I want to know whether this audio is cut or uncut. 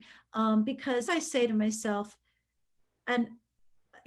cut